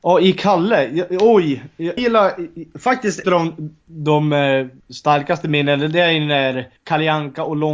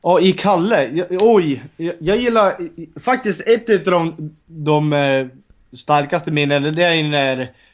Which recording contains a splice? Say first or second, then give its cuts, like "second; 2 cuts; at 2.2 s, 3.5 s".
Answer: first; 4 cuts; at 2.0 s, 3.2 s, 4.8 s, 6.8 s